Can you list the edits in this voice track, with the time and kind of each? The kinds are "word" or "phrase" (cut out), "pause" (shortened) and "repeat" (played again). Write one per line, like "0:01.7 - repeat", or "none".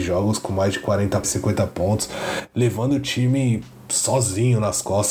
0:01.2 - phrase